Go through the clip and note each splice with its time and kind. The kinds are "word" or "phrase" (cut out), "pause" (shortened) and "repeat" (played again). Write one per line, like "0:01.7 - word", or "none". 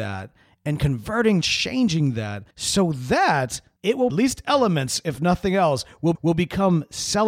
0:01.4 - phrase
0:02.5 - pause
0:04.1 - phrase
0:06.1 - repeat